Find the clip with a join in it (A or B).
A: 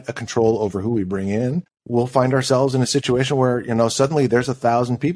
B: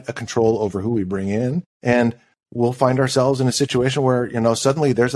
A